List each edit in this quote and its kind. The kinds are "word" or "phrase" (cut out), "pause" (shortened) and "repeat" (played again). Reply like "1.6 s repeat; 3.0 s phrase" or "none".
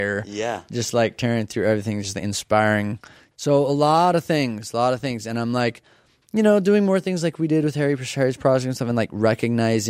none